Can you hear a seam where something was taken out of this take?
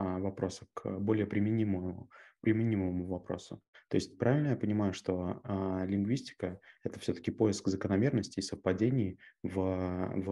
no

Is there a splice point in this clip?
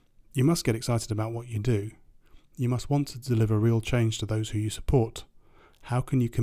no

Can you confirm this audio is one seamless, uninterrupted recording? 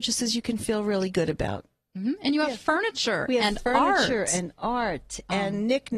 yes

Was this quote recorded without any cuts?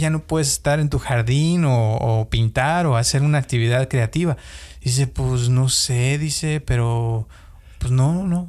yes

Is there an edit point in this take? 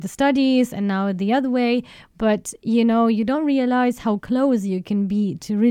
no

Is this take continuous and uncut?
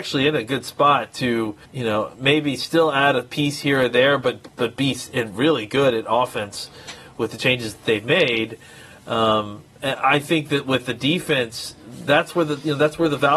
no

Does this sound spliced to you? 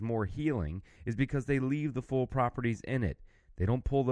no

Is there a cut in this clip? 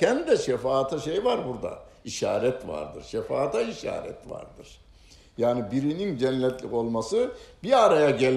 no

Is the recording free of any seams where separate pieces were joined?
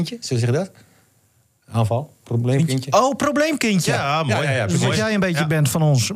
yes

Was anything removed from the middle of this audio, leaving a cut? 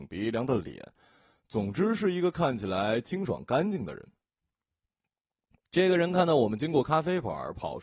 no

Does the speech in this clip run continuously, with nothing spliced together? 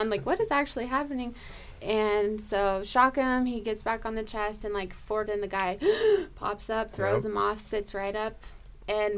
no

